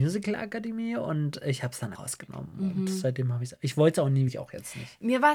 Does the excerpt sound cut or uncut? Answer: cut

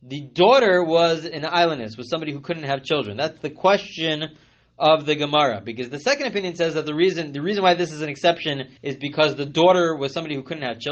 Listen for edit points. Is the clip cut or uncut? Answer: cut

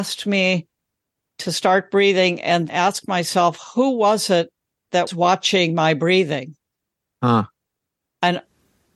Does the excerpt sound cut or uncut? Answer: cut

